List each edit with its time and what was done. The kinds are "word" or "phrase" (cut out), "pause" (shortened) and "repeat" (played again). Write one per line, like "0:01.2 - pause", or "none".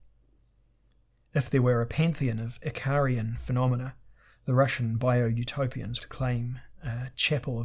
0:06.0 - phrase